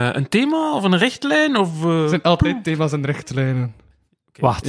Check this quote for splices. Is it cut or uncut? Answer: uncut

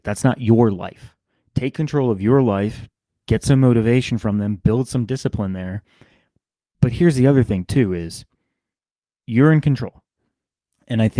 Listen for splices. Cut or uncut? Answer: uncut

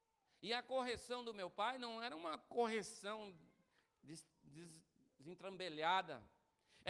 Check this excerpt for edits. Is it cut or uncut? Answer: uncut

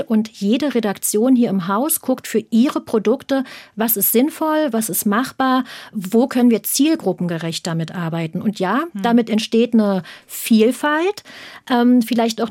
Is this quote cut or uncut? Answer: uncut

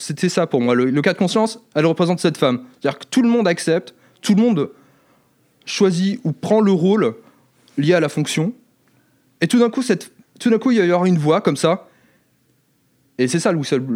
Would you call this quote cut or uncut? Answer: uncut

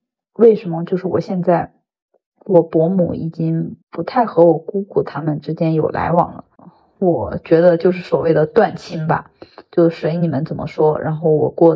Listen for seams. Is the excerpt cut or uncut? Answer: cut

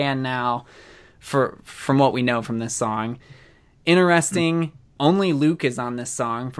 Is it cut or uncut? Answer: uncut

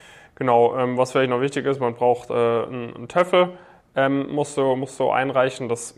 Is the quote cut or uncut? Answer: uncut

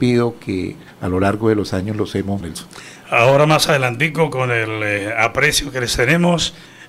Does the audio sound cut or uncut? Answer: cut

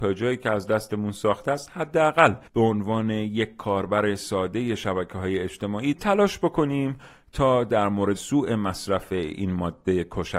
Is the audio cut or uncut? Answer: cut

